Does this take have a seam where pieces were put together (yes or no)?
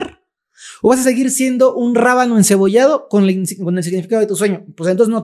no